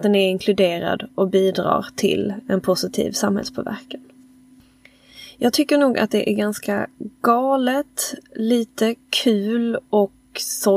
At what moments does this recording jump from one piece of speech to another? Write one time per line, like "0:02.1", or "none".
none